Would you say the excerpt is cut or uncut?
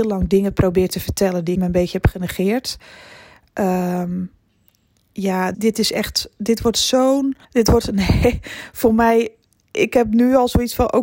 cut